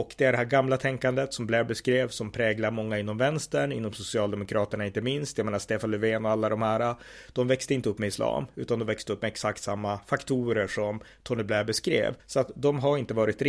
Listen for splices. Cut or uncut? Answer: cut